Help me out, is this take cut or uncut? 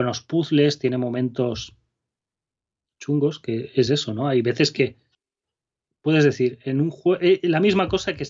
uncut